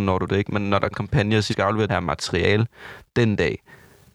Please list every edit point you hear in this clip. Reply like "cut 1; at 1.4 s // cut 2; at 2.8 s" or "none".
cut 1; at 0.9 s // cut 2; at 1.5 s // cut 3; at 1.9 s